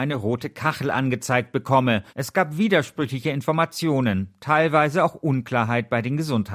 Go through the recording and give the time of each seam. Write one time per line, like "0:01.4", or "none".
0:02.1